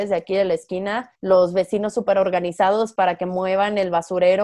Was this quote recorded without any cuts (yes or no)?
no